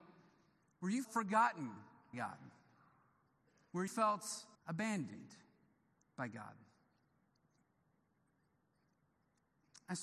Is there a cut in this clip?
yes; 4 cuts; at 1.0 s, 2.1 s, 3.9 s, 4.5 s

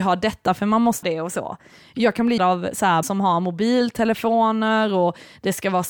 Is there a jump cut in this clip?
yes; 3 cuts; at 1.0 s, 2.4 s, 3.0 s

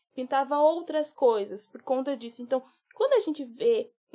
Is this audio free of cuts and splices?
yes; 0 cuts

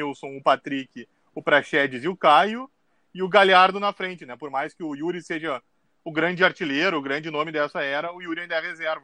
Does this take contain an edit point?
no; 0 cuts

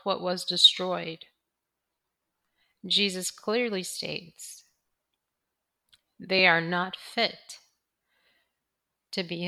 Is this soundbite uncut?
yes; 0 cuts

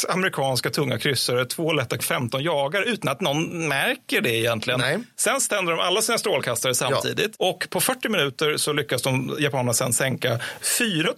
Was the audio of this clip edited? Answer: yes; 1 cut; at 2.0 s

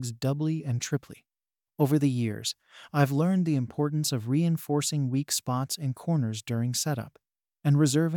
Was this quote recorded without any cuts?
yes; 0 cuts

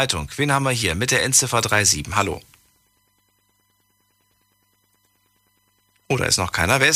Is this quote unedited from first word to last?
yes; 0 cuts

